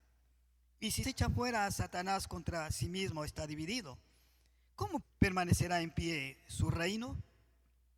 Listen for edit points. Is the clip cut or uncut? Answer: cut